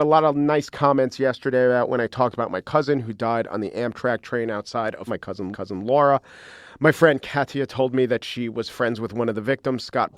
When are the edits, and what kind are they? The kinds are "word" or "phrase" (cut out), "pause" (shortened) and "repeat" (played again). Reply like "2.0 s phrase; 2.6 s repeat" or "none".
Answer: 5.1 s word; 5.5 s repeat